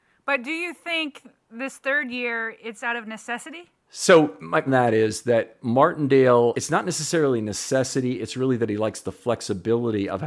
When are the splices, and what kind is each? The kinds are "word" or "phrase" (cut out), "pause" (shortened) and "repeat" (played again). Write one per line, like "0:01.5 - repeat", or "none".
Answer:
0:03.8 - pause
0:04.7 - phrase
0:06.5 - word